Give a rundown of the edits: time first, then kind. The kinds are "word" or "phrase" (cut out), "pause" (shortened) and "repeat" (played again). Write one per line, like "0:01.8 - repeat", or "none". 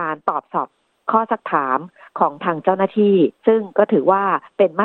0:03.4 - pause